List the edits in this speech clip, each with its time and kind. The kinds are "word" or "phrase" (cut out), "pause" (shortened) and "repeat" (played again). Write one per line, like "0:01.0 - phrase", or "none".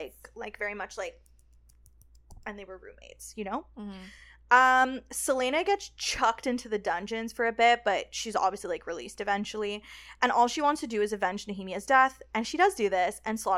none